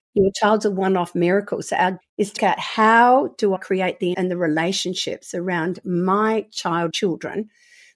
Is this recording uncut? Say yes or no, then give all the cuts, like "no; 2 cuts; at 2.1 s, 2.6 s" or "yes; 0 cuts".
no; 5 cuts; at 2.0 s, 2.4 s, 3.6 s, 4.1 s, 6.9 s